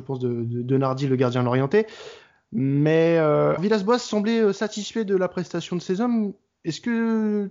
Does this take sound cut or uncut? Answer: cut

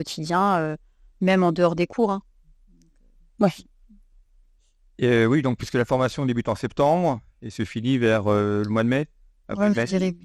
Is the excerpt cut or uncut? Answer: uncut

